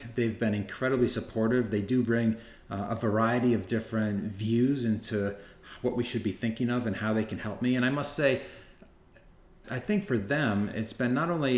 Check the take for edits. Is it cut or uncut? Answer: uncut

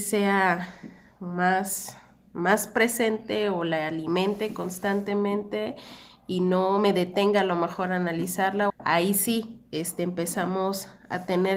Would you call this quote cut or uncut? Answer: cut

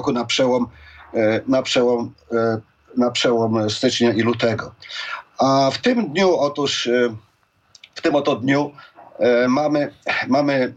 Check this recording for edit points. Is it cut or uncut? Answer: uncut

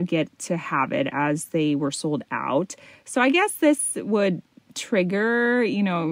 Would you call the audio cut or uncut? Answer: uncut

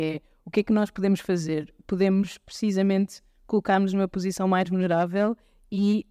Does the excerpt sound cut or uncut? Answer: uncut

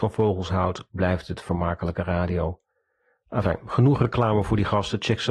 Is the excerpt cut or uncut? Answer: uncut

